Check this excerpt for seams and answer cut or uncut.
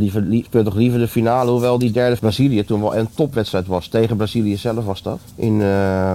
cut